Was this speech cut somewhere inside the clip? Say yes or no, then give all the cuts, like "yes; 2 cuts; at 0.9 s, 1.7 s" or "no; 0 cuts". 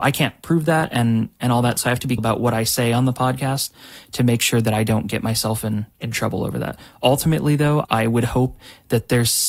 yes; 3 cuts; at 2.2 s, 5.9 s, 7.8 s